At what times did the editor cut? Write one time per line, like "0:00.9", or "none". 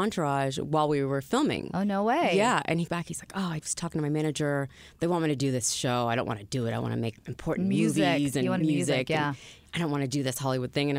0:02.9
0:03.6
0:07.2
0:08.6